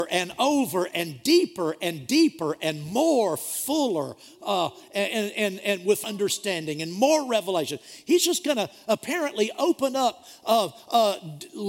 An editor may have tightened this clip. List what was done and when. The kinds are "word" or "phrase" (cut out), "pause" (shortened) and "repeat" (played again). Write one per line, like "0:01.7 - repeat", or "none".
0:06.0 - word